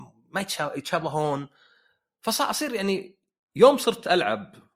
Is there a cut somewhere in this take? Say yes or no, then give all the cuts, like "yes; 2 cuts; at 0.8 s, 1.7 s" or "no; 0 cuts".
no; 0 cuts